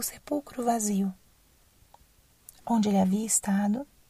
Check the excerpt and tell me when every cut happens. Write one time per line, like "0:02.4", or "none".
none